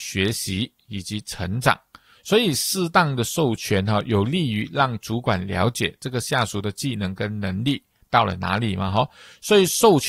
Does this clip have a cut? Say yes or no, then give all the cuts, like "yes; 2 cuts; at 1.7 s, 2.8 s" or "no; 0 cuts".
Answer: no; 0 cuts